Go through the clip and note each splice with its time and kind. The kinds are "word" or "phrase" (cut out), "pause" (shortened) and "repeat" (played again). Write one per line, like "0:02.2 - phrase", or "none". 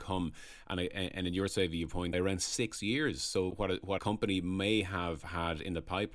0:02.1 - phrase
0:03.5 - word
0:04.0 - word